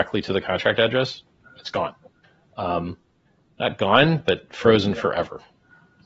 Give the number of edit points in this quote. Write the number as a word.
zero